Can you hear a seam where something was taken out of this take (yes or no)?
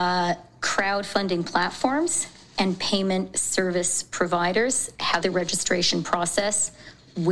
yes